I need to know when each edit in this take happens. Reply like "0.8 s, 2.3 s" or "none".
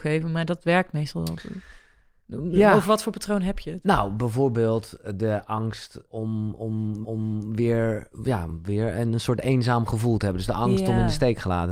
6.1 s, 7.0 s